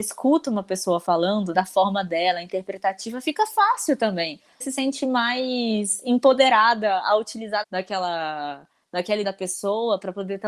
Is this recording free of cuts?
no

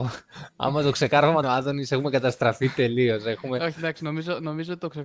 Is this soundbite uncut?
no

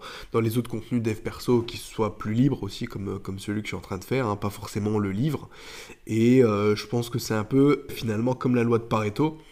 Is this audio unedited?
yes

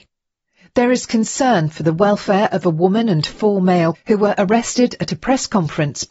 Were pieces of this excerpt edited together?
yes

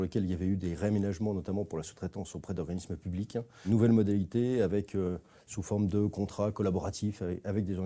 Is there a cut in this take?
no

